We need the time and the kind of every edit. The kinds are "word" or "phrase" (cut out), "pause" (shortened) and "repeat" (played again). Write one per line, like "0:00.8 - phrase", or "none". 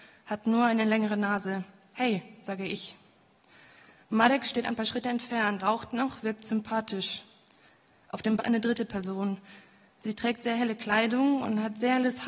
0:05.6 - word
0:08.4 - word